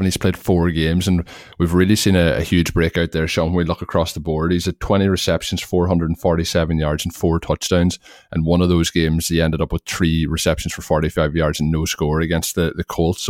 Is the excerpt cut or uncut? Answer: uncut